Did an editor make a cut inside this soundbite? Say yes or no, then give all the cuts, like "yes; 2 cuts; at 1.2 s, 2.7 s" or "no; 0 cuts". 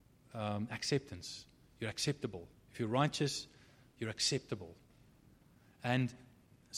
no; 0 cuts